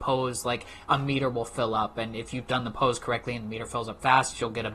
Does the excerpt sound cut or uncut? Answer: uncut